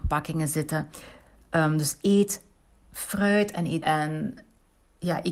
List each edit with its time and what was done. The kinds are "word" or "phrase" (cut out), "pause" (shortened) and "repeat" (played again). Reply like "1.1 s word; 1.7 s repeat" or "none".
3.8 s word